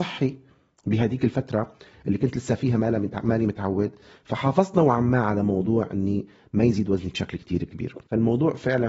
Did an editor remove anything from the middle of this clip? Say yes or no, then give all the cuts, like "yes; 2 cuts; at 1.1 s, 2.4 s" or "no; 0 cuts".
no; 0 cuts